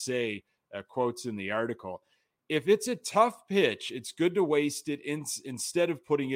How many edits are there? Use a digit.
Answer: 0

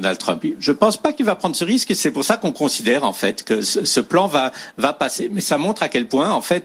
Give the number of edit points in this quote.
0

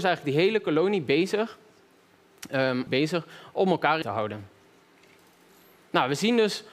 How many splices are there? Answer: 2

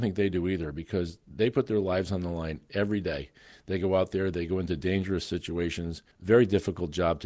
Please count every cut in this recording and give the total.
1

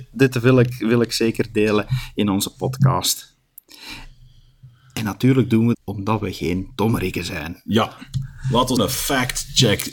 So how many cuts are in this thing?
2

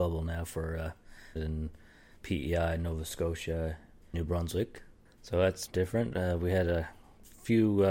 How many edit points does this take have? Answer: 4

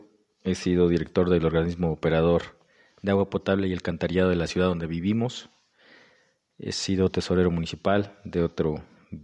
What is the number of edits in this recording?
0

